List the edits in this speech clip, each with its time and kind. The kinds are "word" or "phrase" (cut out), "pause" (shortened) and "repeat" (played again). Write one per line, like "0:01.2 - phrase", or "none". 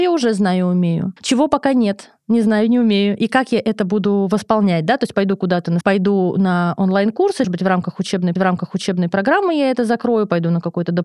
0:01.2 - pause
0:05.8 - word
0:07.4 - word
0:08.4 - repeat